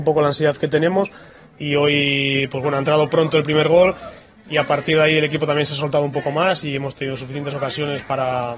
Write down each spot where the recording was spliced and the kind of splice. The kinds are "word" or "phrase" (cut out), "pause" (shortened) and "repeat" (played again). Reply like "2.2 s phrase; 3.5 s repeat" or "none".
none